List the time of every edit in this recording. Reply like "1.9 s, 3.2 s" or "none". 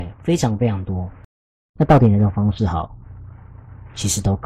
none